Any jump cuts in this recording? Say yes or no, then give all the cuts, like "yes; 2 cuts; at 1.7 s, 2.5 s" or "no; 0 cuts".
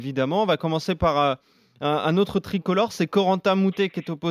no; 0 cuts